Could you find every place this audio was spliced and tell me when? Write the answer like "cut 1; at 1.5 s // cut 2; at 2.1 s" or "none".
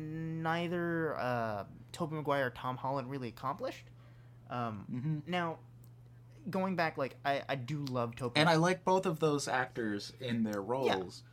none